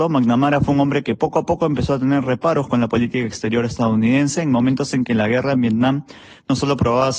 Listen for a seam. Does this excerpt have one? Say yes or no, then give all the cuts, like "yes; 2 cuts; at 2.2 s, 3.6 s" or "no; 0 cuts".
no; 0 cuts